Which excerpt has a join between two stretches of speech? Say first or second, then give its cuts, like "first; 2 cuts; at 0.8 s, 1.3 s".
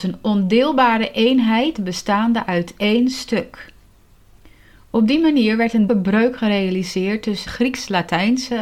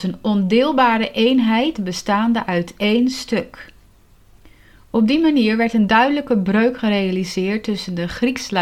first; 2 cuts; at 5.9 s, 7.5 s